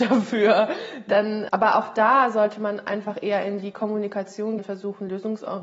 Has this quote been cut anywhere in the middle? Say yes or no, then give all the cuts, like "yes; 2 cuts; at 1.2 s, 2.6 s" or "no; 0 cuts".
yes; 2 cuts; at 1.5 s, 4.6 s